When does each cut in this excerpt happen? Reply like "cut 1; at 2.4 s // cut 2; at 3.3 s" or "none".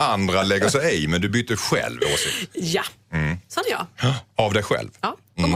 none